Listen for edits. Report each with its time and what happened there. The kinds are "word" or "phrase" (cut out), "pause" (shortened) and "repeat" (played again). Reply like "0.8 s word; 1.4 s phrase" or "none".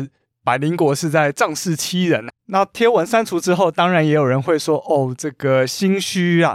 2.3 s word